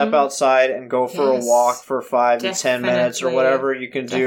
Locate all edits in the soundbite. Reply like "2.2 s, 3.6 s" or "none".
none